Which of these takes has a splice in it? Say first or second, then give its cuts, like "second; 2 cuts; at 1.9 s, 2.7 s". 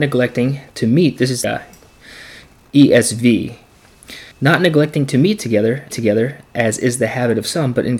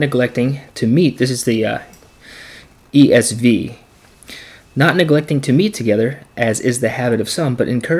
first; 3 cuts; at 1.4 s, 4.3 s, 5.9 s